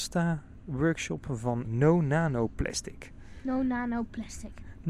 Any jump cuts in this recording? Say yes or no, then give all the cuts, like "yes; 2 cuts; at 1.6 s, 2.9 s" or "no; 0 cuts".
no; 0 cuts